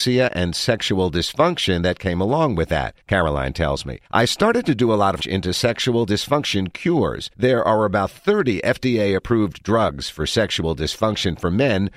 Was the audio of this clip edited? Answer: yes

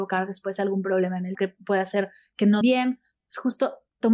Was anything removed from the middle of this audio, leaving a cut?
yes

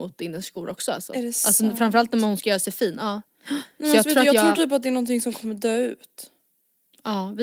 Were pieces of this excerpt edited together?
no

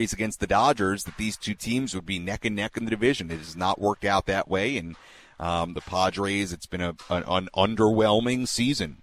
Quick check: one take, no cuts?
yes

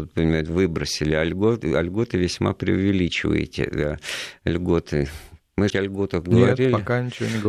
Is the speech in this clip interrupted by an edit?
yes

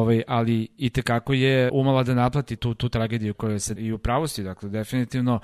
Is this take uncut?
no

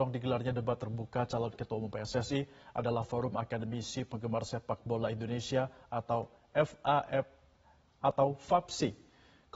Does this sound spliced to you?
no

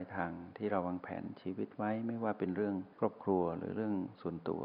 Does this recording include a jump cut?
yes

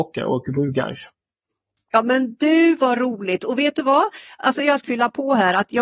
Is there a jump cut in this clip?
yes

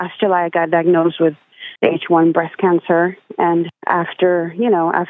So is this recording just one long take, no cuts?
no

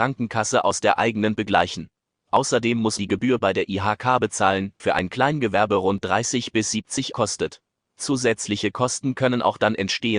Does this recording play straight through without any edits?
no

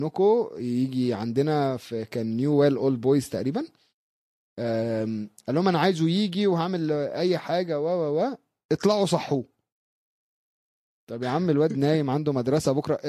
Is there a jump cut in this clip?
no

